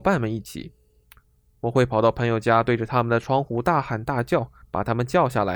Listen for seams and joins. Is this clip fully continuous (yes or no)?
no